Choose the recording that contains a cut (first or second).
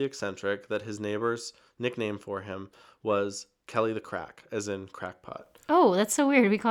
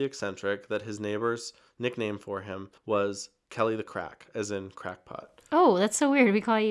second